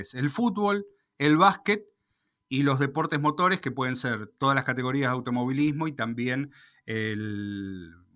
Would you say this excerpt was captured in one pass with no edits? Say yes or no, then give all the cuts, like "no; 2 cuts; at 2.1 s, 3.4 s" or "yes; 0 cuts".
yes; 0 cuts